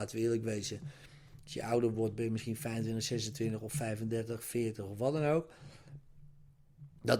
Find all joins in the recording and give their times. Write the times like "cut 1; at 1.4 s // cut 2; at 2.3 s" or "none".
none